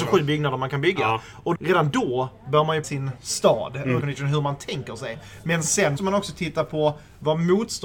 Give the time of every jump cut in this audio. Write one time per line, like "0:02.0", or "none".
0:01.5
0:02.8
0:04.0
0:06.0